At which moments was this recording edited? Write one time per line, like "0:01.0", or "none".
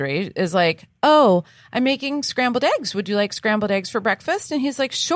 none